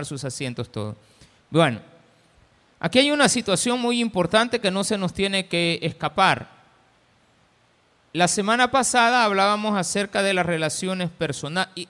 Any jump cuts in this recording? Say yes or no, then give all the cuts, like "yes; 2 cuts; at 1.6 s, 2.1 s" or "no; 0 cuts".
no; 0 cuts